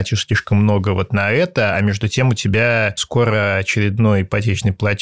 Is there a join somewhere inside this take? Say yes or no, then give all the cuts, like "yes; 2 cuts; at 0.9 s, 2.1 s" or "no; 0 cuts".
no; 0 cuts